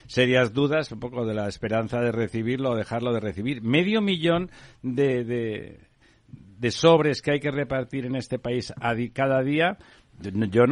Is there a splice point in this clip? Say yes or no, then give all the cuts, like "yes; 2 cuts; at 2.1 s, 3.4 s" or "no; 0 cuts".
no; 0 cuts